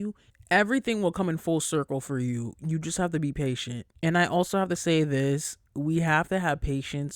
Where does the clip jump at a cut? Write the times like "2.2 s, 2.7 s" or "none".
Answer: 3.9 s